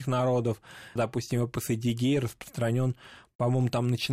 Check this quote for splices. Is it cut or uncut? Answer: cut